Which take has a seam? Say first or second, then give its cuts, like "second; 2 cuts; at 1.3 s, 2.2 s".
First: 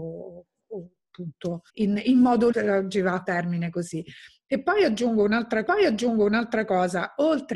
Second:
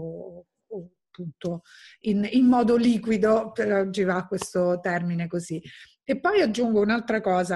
first; 4 cuts; at 1.7 s, 2.5 s, 3.2 s, 5.7 s